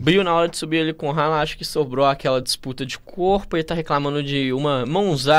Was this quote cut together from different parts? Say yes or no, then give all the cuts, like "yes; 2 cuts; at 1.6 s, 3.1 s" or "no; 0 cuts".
no; 0 cuts